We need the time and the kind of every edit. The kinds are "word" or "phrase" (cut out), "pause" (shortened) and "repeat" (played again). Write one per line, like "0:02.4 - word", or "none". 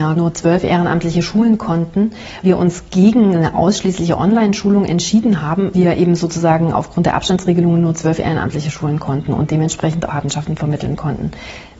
0:02.4 - word
0:05.7 - word
0:10.1 - phrase